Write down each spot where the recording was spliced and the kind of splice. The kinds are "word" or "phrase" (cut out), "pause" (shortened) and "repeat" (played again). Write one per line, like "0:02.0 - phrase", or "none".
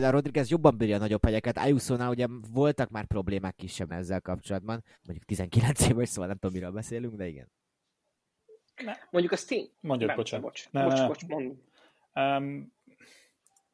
0:03.9 - word
0:04.9 - pause
0:09.7 - pause